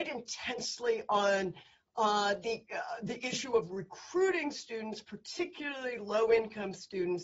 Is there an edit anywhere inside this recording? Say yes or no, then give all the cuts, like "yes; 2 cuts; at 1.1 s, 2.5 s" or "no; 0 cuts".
no; 0 cuts